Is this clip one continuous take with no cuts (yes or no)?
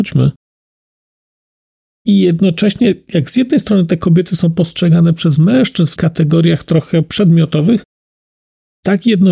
no